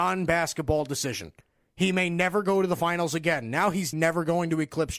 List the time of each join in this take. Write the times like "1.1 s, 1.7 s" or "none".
3.9 s